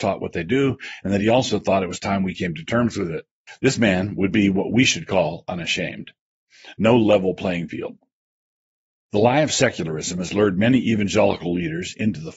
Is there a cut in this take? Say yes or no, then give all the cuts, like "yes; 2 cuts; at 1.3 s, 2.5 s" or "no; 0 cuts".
no; 0 cuts